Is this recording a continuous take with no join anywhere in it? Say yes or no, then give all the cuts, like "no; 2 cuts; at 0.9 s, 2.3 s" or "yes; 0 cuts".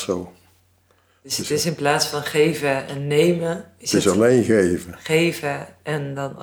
yes; 0 cuts